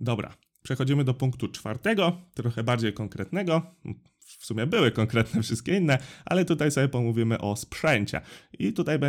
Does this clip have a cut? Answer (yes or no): no